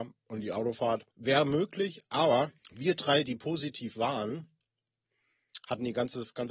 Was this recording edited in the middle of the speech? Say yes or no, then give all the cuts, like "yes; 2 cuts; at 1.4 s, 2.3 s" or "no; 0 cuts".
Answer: yes; 2 cuts; at 1.1 s, 2.6 s